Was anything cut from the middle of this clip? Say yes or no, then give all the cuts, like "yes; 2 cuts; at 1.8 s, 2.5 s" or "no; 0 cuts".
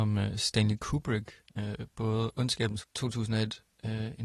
yes; 2 cuts; at 1.5 s, 2.8 s